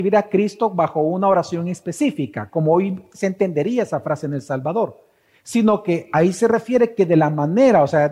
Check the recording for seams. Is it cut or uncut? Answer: uncut